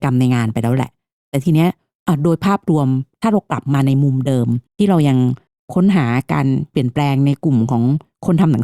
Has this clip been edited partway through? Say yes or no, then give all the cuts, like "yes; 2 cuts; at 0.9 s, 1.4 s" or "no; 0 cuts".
yes; 1 cut; at 4.7 s